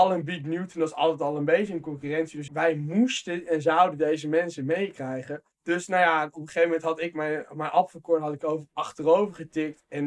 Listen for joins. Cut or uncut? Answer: cut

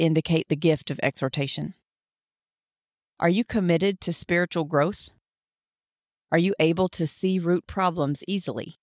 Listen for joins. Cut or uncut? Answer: uncut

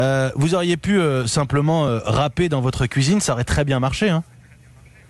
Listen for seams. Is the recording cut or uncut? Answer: uncut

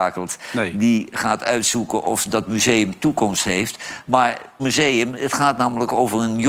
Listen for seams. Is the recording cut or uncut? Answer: cut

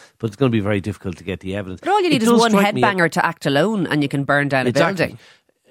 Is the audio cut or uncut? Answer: uncut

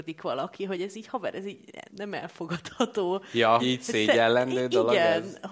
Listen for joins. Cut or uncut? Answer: cut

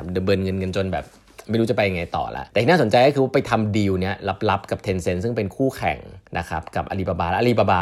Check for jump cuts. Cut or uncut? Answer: cut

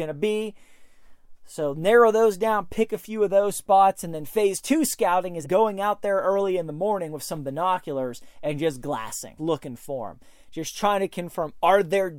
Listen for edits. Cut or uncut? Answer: cut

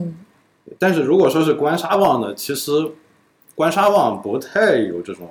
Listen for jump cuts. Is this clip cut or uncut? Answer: uncut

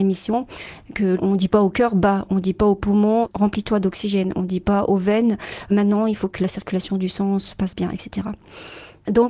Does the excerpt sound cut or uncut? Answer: uncut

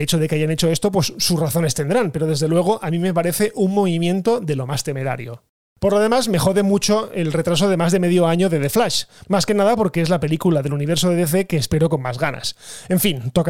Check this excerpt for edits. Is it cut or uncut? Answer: uncut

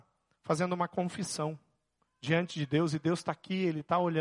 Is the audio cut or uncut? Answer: uncut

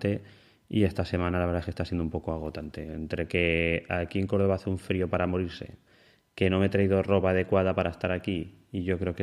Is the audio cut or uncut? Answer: uncut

